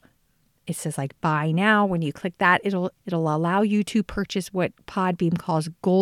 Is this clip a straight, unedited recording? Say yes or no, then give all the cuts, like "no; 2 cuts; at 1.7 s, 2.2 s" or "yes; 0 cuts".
no; 1 cut; at 3.0 s